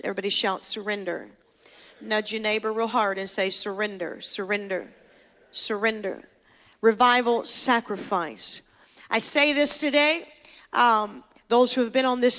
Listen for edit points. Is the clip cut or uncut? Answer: uncut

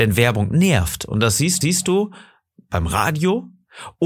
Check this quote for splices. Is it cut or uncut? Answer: cut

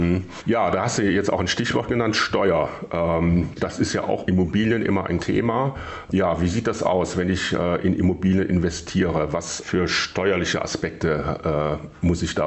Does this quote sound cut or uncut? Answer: cut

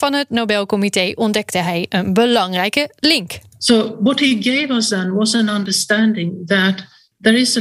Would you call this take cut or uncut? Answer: uncut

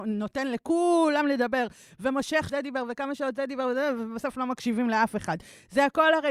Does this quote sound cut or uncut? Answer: cut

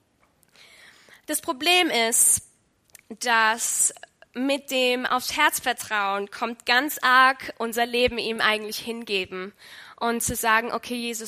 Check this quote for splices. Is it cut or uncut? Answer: uncut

